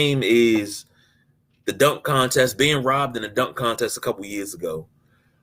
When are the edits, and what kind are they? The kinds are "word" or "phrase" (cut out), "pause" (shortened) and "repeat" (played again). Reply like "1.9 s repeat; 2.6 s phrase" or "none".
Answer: none